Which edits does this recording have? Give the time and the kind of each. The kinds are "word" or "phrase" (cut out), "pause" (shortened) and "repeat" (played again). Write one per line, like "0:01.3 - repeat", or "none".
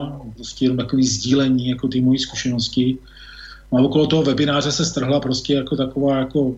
none

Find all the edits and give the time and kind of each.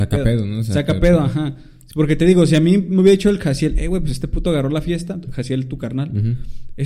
none

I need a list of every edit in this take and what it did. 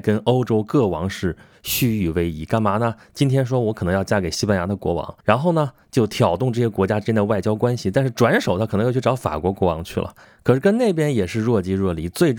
0:05.2 - pause

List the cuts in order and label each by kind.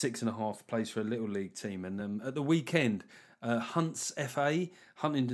none

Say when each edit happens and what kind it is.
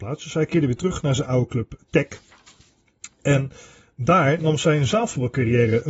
none

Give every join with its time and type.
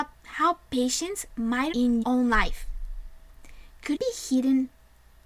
0:01.7 - word
0:02.0 - word
0:03.9 - word

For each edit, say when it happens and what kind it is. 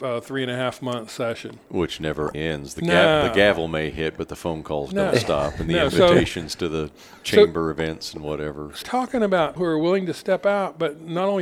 0:02.3 - word
0:08.8 - word
0:09.6 - word

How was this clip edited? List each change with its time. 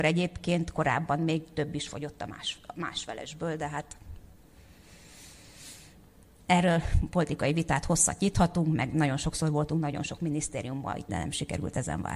0:11.1 - word

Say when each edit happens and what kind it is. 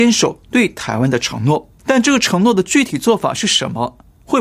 0:01.8 - pause

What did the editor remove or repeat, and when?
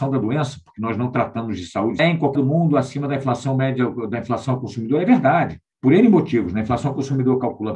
0:02.0 - phrase
0:02.3 - word

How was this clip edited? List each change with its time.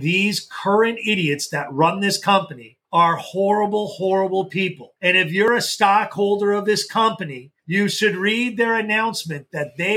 0:02.8 - pause
0:05.0 - pause
0:07.6 - pause

